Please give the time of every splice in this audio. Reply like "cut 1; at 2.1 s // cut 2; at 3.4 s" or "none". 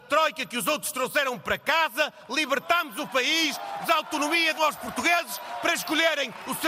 cut 1; at 3.8 s // cut 2; at 4.6 s